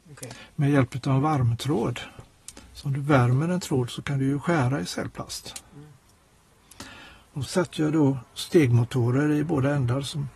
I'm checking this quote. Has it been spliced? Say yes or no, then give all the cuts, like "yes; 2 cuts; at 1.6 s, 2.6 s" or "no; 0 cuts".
yes; 2 cuts; at 2.6 s, 7.5 s